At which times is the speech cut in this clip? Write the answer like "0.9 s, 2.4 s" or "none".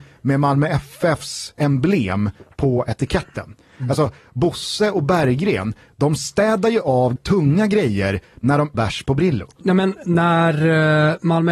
1.6 s, 7.2 s, 8.7 s